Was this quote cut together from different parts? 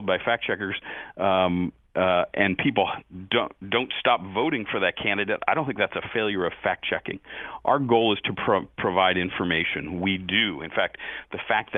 no; 0 cuts

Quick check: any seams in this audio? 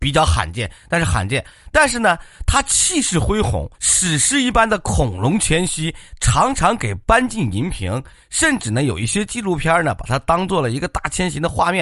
yes; 1 cut; at 3.7 s

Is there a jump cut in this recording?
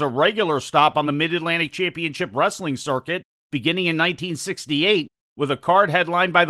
no; 0 cuts

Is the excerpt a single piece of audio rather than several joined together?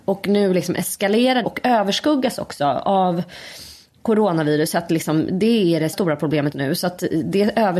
no; 3 cuts; at 1.4 s, 5.9 s, 6.5 s

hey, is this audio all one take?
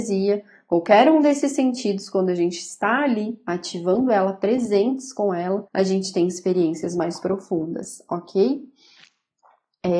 no; 1 cut; at 5.7 s

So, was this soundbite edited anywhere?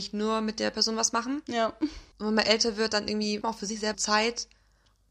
yes; 3 cuts; at 2.1 s, 3.4 s, 3.9 s

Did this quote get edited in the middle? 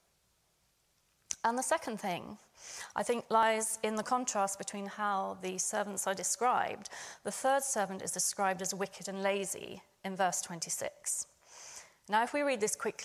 no; 0 cuts

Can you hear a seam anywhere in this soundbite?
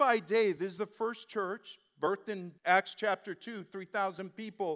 yes; 1 cut; at 2.6 s

